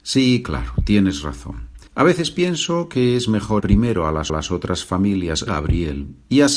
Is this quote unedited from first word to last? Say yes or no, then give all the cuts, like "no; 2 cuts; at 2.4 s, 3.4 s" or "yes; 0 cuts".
no; 4 cuts; at 1.9 s, 3.6 s, 4.3 s, 5.5 s